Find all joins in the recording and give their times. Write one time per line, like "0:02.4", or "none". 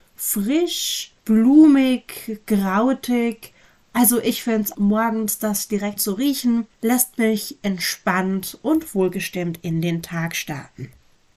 0:01.2
0:04.7
0:06.0

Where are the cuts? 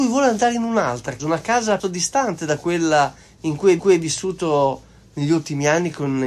0:01.2
0:01.8
0:03.8

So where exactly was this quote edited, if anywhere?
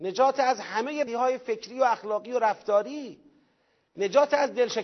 0:01.1

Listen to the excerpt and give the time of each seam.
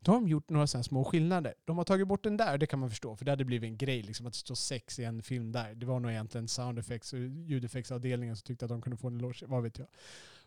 none

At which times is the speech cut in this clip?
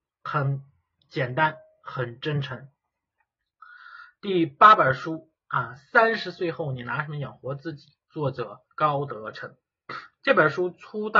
0:08.0
0:08.7

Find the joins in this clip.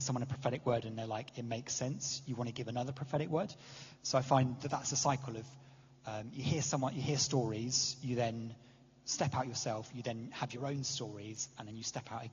none

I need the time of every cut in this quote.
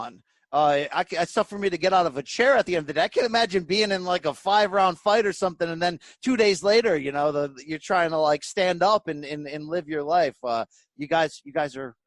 none

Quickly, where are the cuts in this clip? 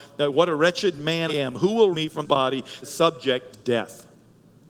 0:01.3
0:01.9
0:02.2
0:02.8
0:03.5

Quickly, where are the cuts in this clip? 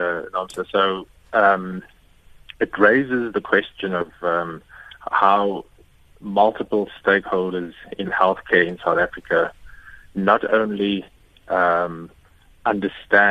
none

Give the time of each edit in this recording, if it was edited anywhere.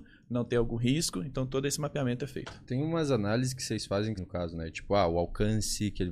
0:04.2

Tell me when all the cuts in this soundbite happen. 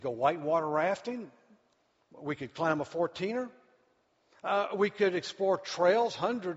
none

